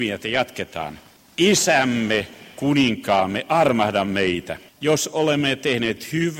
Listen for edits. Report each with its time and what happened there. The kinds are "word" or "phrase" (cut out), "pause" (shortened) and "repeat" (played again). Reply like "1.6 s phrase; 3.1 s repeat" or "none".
1.2 s pause; 4.7 s pause